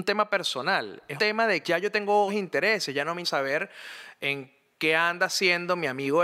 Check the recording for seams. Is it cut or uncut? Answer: cut